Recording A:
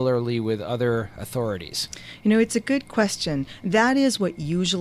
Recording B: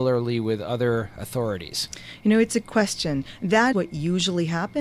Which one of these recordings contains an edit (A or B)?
B